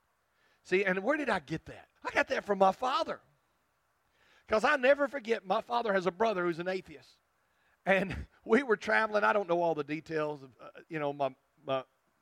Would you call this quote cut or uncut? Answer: cut